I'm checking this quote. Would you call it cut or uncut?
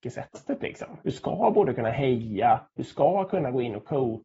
cut